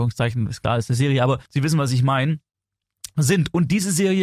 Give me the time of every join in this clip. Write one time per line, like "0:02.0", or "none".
0:01.5